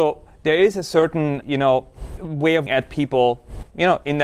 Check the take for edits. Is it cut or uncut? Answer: cut